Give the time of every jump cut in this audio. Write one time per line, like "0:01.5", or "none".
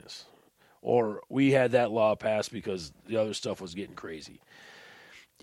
none